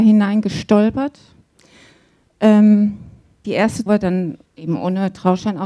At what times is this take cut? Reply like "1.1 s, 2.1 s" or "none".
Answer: 3.4 s, 3.9 s, 4.5 s